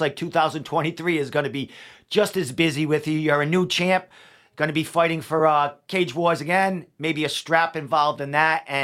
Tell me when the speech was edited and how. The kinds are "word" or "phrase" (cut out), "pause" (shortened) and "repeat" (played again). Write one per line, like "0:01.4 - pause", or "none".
none